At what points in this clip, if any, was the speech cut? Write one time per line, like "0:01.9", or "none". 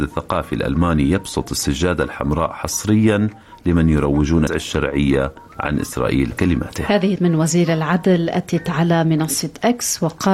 0:04.5
0:06.3
0:07.2

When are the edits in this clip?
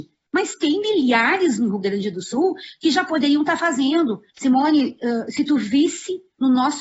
0:04.3

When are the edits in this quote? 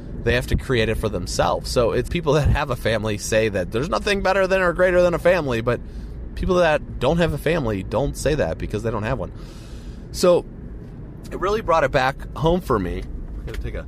0:02.1

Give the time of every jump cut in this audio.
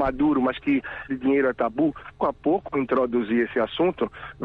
0:01.1
0:02.2

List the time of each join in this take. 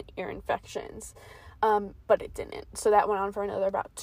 0:02.0

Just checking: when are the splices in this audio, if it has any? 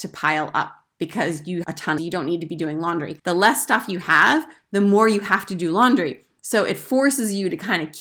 0:01.6
0:02.0
0:03.2

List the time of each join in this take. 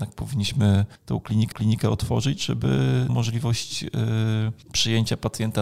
0:01.0
0:01.5
0:03.1
0:04.6

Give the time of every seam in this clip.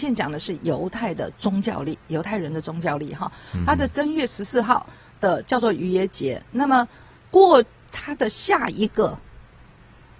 none

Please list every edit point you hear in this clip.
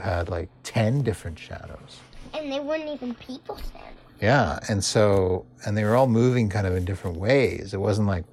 0:04.1

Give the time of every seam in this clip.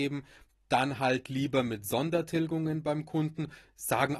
none

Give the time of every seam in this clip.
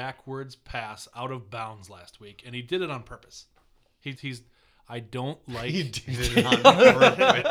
0:04.1

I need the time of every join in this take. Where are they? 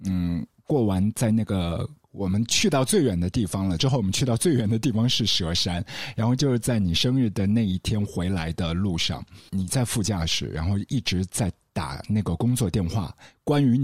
0:02.0
0:03.8
0:09.5

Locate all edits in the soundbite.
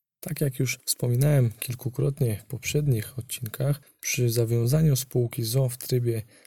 none

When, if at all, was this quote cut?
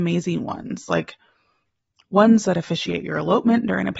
none

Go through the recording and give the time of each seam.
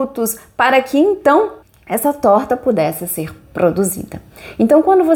0:01.6

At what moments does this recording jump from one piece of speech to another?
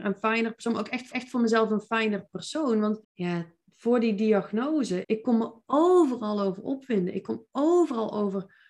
0:01.1
0:03.0
0:05.0

